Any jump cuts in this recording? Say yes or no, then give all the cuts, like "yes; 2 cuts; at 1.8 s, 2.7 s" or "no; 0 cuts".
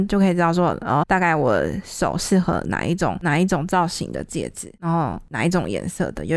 yes; 1 cut; at 1.0 s